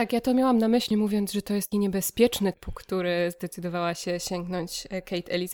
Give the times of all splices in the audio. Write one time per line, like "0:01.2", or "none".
0:00.9
0:01.7
0:02.5